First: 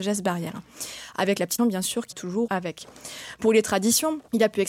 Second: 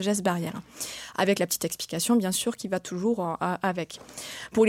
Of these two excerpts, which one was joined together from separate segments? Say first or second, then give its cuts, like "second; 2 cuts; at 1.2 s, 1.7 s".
first; 3 cuts; at 1.6 s, 2.1 s, 2.5 s